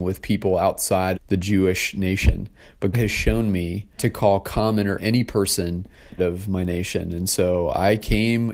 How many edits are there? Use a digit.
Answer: 5